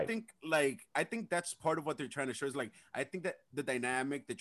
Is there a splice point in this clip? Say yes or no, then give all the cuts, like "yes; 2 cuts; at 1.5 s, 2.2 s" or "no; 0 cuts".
no; 0 cuts